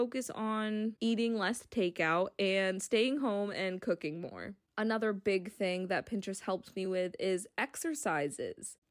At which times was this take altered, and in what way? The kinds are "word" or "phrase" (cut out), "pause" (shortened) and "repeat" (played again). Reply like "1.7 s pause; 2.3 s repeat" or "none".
none